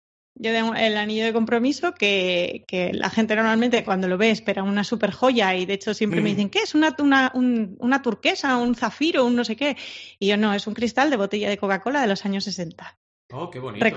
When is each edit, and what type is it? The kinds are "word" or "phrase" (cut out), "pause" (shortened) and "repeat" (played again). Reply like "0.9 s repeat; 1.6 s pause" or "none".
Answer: none